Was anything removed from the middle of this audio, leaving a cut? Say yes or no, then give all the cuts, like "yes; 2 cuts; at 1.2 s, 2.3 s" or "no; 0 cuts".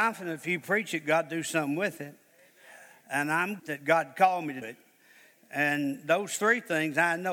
yes; 2 cuts; at 3.6 s, 4.6 s